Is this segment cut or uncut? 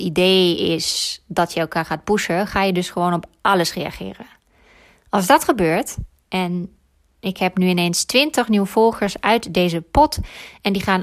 uncut